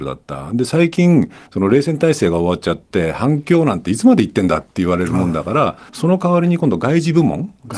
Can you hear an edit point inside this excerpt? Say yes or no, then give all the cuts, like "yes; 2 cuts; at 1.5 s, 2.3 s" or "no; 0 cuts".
yes; 2 cuts; at 1.5 s, 5.9 s